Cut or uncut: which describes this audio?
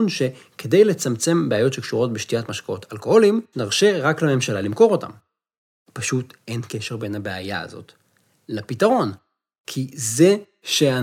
uncut